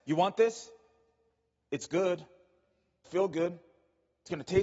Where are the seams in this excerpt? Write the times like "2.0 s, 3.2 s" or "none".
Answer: 3.0 s

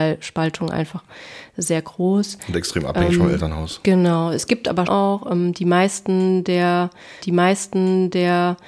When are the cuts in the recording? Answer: 4.9 s, 7.2 s

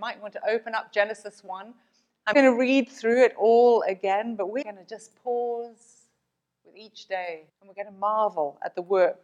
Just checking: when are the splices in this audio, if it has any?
2.3 s, 4.6 s, 7.5 s

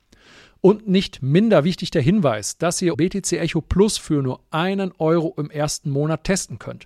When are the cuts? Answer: 2.9 s

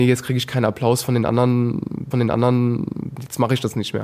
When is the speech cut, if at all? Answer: 2.1 s

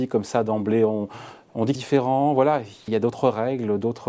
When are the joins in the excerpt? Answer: 1.7 s, 2.9 s

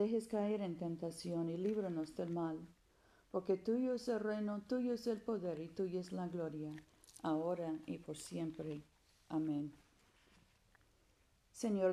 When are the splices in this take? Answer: none

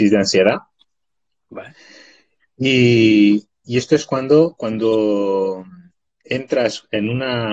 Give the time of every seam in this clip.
5.9 s

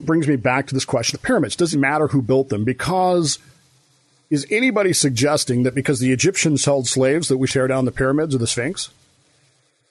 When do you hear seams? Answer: 1.1 s, 1.7 s, 7.5 s

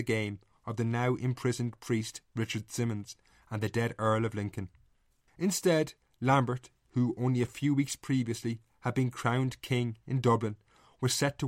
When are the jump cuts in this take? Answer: none

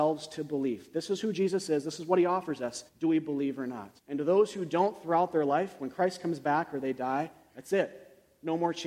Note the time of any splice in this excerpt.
2.9 s, 4.0 s

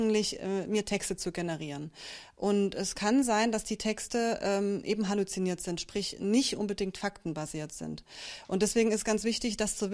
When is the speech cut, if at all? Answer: none

